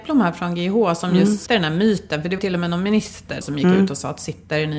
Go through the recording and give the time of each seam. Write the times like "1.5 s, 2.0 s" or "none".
1.5 s, 2.4 s, 3.4 s